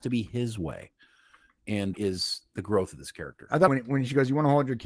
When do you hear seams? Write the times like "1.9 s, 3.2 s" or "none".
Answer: 1.9 s, 3.7 s